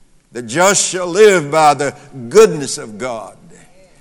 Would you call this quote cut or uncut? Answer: uncut